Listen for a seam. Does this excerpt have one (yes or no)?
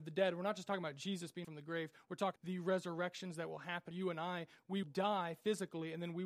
yes